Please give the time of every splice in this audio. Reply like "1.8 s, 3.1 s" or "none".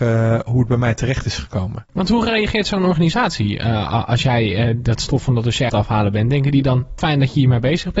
5.7 s, 7.0 s